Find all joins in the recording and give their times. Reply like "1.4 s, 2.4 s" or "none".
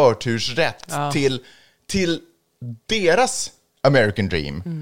none